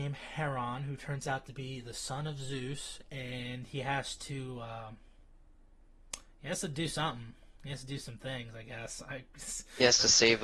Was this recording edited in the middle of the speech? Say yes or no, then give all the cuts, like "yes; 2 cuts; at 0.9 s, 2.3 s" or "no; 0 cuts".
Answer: no; 0 cuts